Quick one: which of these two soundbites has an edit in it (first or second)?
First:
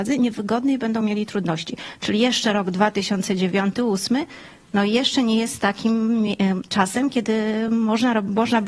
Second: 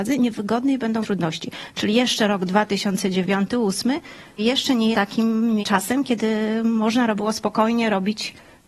second